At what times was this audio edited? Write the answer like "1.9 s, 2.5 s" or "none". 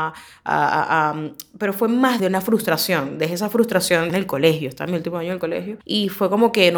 2.2 s, 4.1 s, 5.8 s